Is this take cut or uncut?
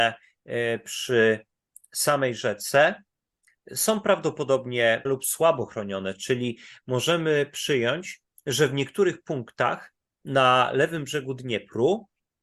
cut